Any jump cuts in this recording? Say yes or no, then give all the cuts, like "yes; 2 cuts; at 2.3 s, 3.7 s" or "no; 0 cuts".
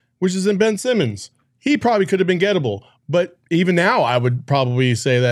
no; 0 cuts